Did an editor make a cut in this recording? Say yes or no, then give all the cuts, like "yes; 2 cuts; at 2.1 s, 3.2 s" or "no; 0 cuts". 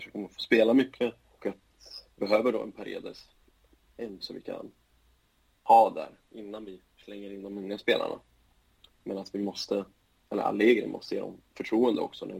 yes; 4 cuts; at 1.4 s, 2.2 s, 4.2 s, 6.9 s